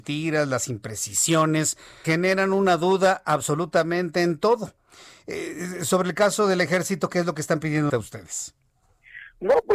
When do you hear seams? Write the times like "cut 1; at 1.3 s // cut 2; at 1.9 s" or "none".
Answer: cut 1; at 2.0 s // cut 2; at 7.9 s